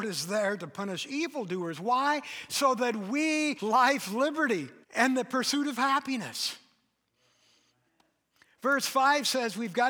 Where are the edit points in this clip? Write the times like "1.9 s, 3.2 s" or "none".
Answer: 3.6 s, 4.8 s

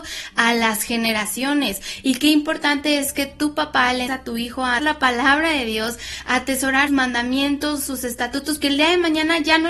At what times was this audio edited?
4.1 s, 4.8 s, 6.9 s, 8.6 s

